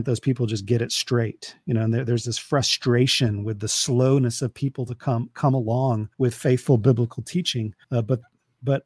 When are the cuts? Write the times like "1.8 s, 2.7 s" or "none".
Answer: 6.1 s, 7.8 s